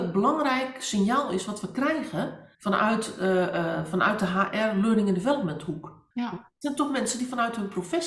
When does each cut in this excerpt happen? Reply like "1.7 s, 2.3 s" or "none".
2.5 s, 6.1 s